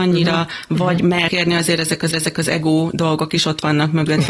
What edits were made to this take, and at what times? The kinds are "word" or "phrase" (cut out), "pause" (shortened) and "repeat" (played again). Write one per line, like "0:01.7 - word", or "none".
0:01.3 - word
0:02.1 - repeat